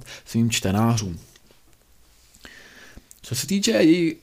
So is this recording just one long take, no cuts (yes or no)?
yes